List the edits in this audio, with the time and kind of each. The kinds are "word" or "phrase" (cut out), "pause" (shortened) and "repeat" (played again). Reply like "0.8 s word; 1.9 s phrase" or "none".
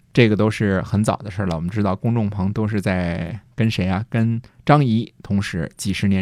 4.5 s pause